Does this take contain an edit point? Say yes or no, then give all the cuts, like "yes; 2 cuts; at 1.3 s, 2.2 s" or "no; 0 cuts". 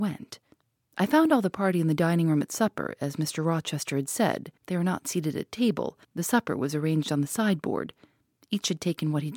yes; 2 cuts; at 4.6 s, 6.0 s